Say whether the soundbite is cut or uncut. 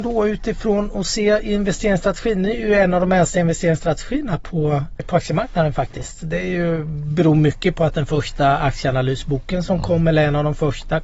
uncut